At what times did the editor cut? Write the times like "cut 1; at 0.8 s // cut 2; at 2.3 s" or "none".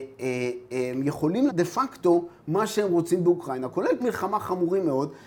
cut 1; at 1.5 s // cut 2; at 4.0 s